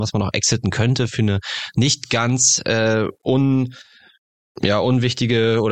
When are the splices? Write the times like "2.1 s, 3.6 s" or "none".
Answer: none